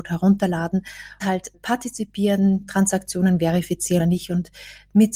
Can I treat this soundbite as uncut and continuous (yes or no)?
no